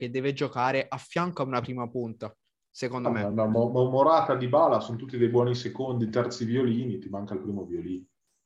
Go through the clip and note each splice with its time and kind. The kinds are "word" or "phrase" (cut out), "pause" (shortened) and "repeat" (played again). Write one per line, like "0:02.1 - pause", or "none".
none